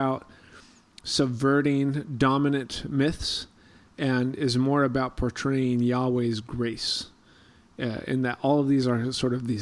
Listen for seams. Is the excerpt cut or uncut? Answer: uncut